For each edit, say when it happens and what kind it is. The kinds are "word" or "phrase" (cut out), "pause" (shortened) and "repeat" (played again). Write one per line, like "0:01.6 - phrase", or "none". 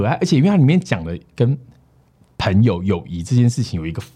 none

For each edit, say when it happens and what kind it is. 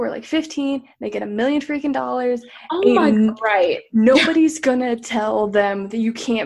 none

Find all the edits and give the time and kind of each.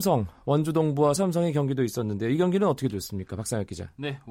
0:01.2 - word

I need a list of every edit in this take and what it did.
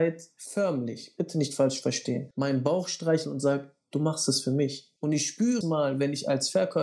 0:05.6 - word

